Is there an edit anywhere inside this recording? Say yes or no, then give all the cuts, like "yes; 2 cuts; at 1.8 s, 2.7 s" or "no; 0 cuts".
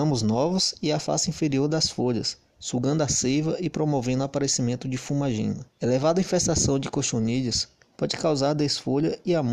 yes; 1 cut; at 5.7 s